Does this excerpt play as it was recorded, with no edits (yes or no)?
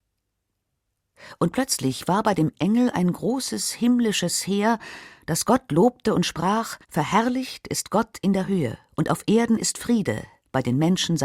no